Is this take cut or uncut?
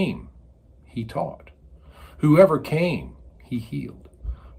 uncut